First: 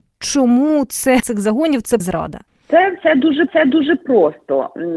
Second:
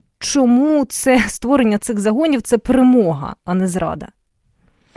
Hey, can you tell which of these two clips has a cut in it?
first; 4 cuts; at 1.2 s, 2.0 s, 2.5 s, 3.5 s

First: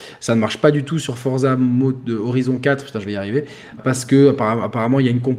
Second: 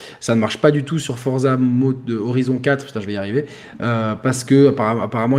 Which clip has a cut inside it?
first; 1 cut; at 3.8 s

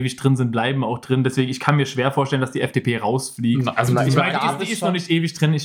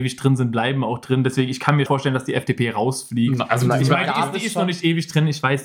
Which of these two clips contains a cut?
second; 1 cut; at 1.9 s

